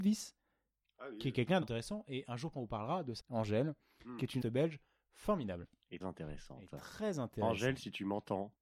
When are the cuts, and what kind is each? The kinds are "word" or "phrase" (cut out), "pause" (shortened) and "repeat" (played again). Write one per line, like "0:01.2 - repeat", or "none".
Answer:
0:01.6 - word
0:02.5 - word
0:03.2 - word
0:04.4 - word
0:06.0 - word